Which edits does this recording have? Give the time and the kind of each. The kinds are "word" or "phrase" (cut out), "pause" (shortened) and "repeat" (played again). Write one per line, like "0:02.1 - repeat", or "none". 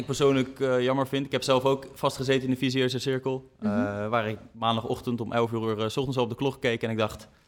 none